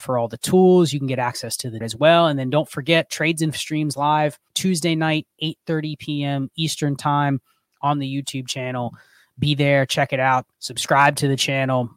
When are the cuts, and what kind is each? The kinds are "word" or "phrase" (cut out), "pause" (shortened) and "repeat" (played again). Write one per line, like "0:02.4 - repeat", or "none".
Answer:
0:01.8 - word
0:03.5 - word
0:04.5 - pause
0:10.5 - pause